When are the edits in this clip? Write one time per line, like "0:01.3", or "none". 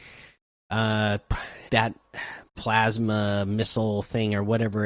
0:01.7
0:02.5